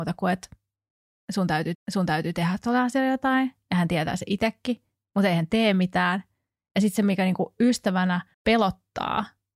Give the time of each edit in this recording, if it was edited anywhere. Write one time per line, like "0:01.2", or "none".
0:01.7
0:08.3

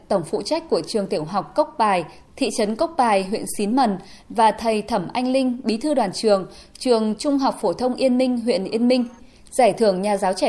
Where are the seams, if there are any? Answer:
none

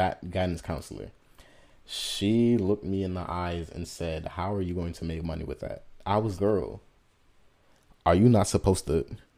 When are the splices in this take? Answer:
0:06.4

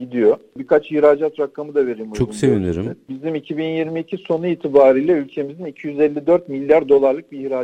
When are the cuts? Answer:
none

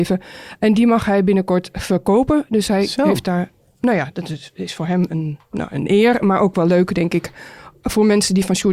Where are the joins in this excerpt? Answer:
none

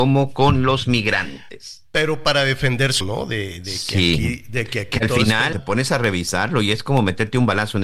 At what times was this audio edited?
0:03.0
0:05.5

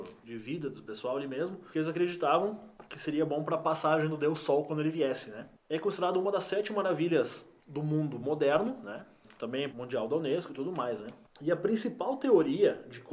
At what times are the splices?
0:09.7

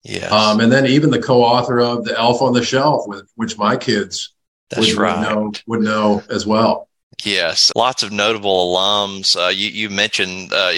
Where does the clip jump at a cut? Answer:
0:07.7

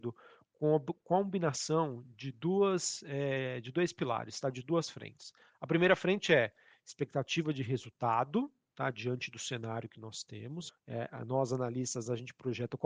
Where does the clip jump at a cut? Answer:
0:10.7

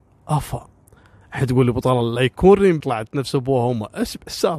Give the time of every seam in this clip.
0:02.8

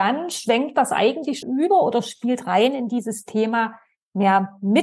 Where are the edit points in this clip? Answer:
0:01.4

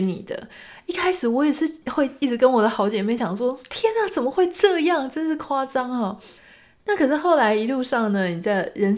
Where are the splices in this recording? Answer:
0:01.8
0:06.4

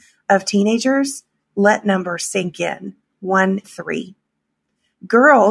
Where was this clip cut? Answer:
0:01.8
0:03.6

